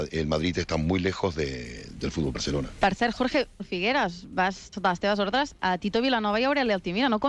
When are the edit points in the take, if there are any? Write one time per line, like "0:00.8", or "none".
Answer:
0:02.3
0:03.6
0:04.7